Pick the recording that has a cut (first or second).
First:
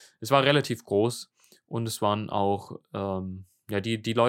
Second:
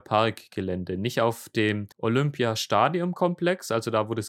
second